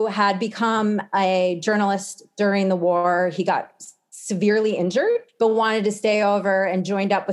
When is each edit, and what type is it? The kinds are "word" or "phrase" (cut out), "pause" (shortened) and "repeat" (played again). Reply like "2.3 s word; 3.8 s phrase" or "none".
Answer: 5.3 s pause

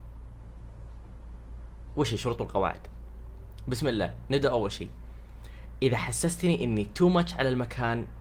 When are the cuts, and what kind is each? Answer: none

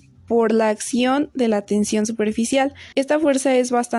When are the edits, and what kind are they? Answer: 2.9 s pause

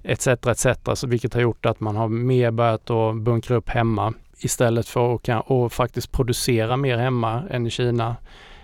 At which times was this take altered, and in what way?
none

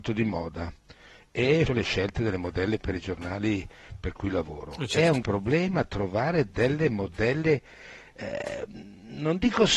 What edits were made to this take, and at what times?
1.7 s word; 5.2 s word

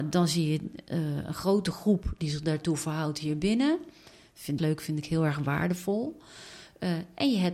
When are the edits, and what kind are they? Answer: 4.6 s phrase

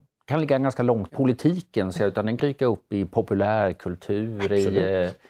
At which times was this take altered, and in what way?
1.1 s word; 2.0 s word; 2.4 s word

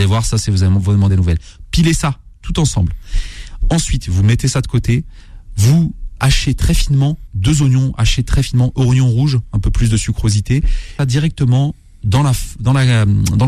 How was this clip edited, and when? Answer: 1.1 s word; 6.2 s word; 7.3 s phrase; 11.0 s phrase

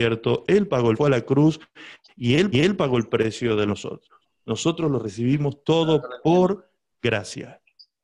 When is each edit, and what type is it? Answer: 0.9 s phrase; 2.5 s repeat; 3.7 s phrase

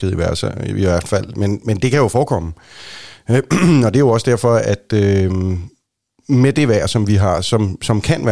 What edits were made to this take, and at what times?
none

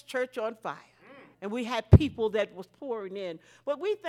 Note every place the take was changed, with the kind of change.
1.3 s pause

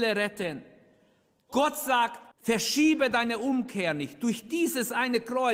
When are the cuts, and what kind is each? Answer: 2.3 s pause

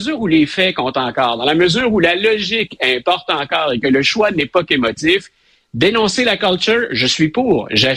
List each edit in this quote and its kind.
6.4 s word

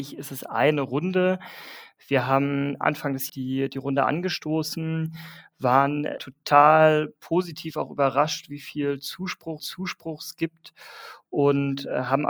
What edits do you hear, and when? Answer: 3.3 s word; 6.2 s word; 9.6 s repeat

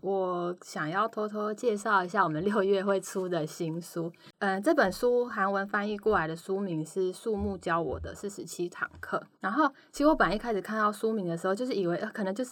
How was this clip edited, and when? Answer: 9.3 s pause

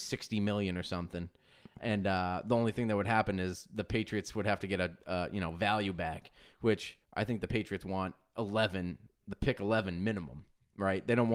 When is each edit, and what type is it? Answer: 7.0 s pause

